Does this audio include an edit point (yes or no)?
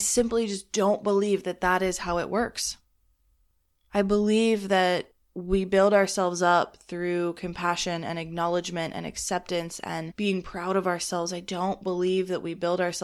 no